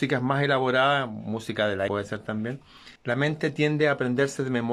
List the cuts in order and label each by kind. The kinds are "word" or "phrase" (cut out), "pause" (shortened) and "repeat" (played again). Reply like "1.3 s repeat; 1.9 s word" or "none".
1.9 s word; 3.0 s pause